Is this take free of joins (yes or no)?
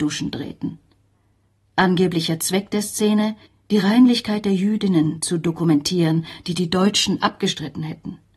no